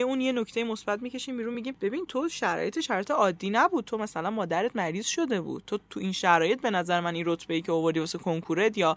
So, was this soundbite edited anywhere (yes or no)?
no